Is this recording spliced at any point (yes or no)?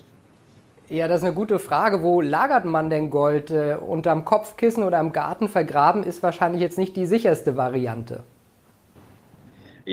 no